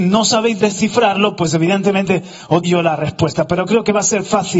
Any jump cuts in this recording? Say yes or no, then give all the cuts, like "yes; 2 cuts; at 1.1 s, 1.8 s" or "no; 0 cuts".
yes; 1 cut; at 2.6 s